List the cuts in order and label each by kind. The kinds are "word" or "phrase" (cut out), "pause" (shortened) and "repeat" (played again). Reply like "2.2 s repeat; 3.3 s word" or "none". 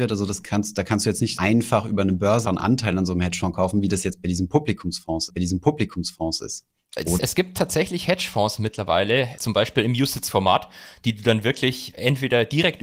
1.4 s word; 2.4 s word; 5.3 s repeat; 7.2 s word; 9.4 s word; 11.9 s word